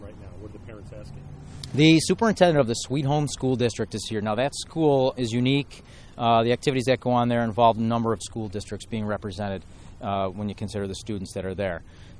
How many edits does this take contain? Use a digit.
2